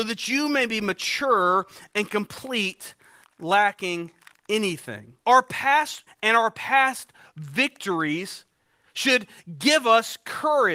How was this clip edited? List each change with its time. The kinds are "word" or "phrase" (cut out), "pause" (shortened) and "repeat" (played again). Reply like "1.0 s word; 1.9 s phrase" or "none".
3.2 s word; 5.2 s pause; 6.1 s word